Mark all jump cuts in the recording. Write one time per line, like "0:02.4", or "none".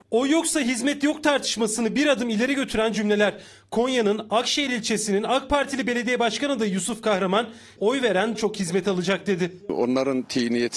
0:07.8
0:08.3